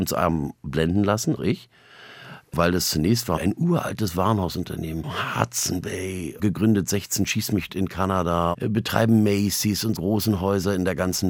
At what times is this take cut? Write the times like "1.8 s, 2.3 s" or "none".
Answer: 1.4 s, 3.4 s, 6.4 s, 7.7 s, 8.5 s, 10.0 s